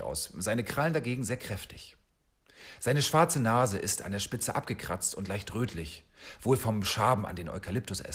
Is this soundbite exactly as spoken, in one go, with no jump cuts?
yes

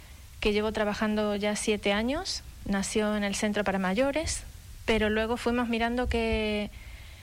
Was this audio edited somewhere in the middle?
no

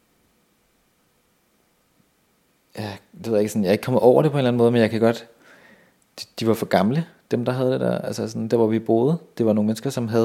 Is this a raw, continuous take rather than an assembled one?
yes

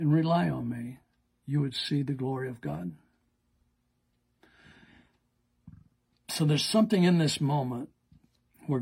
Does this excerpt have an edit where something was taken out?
no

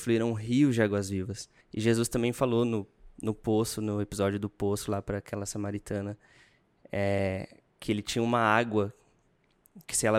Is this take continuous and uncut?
no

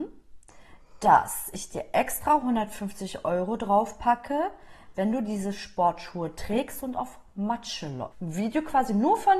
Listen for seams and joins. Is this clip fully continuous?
no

